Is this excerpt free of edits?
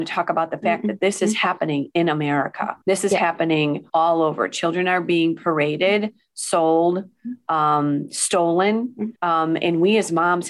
no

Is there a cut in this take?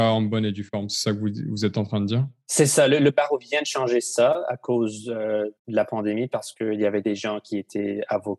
yes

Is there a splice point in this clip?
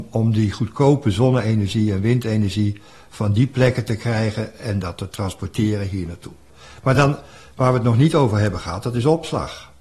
no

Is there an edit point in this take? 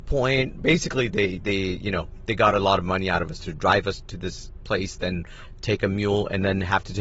no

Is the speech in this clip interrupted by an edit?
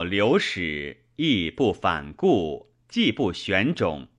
no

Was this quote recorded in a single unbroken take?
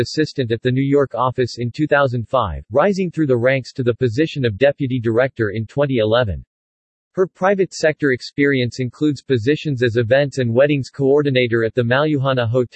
yes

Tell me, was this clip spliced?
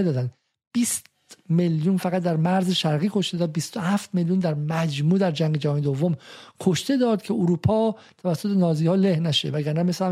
no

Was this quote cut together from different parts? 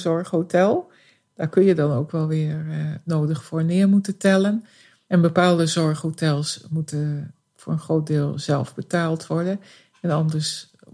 no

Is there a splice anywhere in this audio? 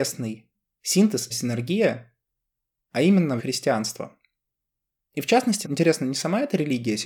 yes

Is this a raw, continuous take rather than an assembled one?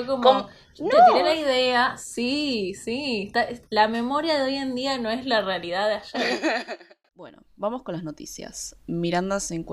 no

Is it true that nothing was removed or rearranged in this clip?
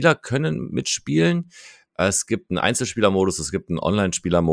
yes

